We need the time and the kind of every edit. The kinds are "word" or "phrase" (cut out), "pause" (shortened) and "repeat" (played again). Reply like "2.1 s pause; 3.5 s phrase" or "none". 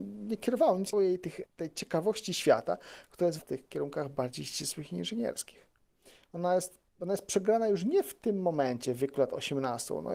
0.9 s phrase; 1.5 s pause; 3.4 s phrase; 6.9 s pause